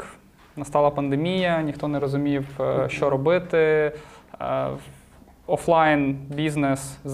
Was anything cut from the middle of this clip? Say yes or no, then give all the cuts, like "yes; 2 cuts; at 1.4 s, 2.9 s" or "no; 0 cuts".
no; 0 cuts